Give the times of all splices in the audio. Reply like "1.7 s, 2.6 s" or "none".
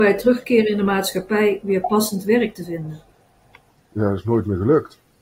none